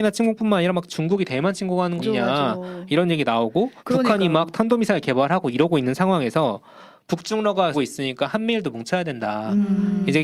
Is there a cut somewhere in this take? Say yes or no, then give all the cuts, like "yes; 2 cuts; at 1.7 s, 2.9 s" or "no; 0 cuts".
yes; 3 cuts; at 2.0 s, 3.8 s, 7.7 s